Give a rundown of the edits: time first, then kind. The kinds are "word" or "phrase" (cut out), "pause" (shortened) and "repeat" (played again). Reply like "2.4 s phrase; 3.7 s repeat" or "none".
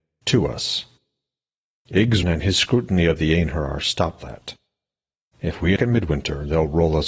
2.2 s word; 4.2 s word; 5.8 s word